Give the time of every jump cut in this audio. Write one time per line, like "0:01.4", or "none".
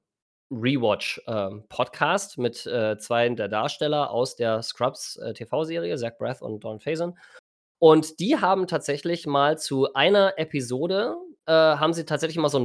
none